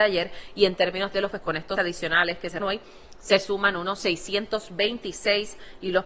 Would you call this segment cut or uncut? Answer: cut